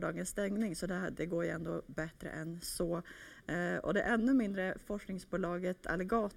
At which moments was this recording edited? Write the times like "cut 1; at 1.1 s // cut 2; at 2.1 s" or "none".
none